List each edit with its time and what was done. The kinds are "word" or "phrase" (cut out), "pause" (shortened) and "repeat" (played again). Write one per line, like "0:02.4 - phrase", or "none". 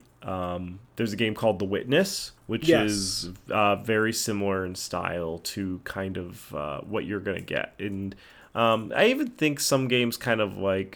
0:02.4 - pause